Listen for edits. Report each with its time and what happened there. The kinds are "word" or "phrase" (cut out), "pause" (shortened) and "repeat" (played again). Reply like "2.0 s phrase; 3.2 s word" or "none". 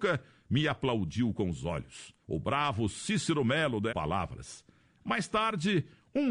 2.2 s pause; 3.9 s phrase